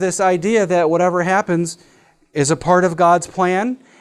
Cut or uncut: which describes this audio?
uncut